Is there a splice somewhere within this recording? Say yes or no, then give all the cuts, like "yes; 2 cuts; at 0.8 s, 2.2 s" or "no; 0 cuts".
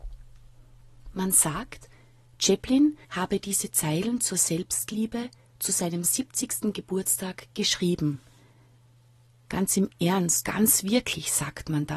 yes; 2 cuts; at 3.0 s, 10.4 s